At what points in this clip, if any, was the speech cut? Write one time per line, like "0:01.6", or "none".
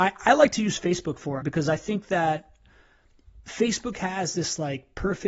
0:01.4